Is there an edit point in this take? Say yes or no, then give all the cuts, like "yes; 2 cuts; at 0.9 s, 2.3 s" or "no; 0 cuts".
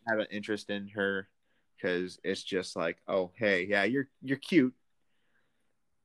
no; 0 cuts